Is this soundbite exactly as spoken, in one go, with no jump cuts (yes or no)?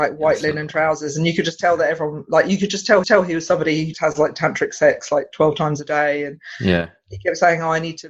no